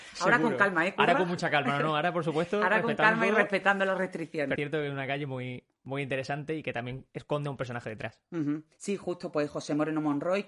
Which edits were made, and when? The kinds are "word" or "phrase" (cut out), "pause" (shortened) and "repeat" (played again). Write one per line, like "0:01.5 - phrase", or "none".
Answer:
0:04.6 - word
0:08.7 - pause